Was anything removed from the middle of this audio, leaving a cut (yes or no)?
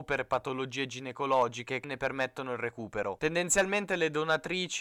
yes